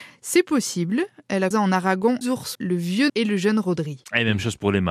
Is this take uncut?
no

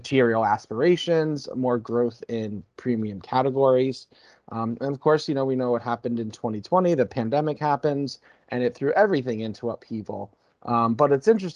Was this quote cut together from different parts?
no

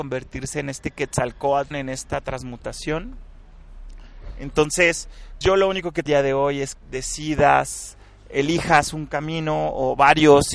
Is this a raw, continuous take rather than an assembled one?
no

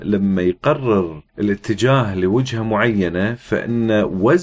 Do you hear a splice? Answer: yes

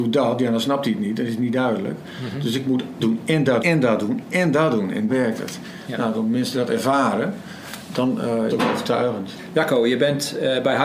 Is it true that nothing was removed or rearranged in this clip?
no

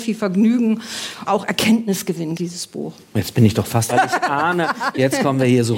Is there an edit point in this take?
yes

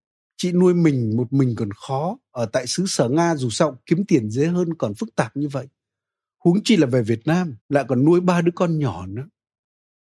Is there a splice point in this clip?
yes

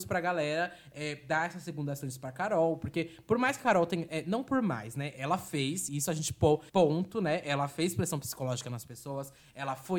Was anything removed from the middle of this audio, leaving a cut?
yes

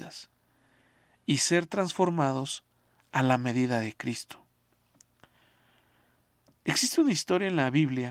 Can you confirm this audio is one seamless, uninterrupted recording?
yes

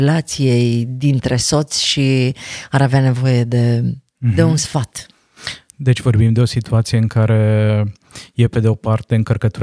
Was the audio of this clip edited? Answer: no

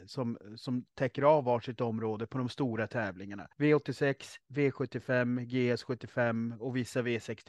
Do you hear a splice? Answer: yes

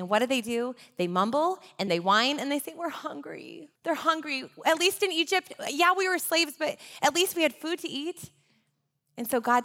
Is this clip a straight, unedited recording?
no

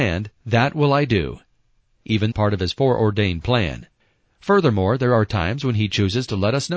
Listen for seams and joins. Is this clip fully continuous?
no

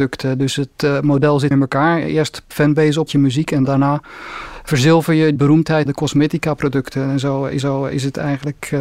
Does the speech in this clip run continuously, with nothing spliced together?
no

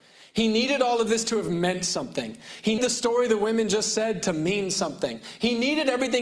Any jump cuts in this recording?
yes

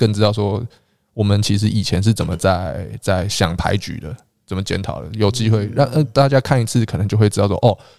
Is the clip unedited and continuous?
yes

